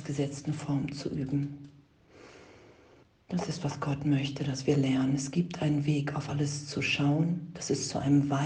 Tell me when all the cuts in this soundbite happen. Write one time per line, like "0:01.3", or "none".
0:03.0